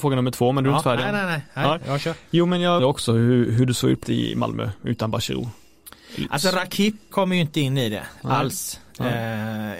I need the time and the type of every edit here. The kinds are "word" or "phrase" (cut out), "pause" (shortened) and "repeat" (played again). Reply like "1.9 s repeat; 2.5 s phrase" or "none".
2.8 s word; 4.0 s word; 7.1 s word